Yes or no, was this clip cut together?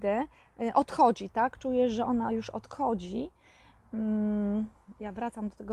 no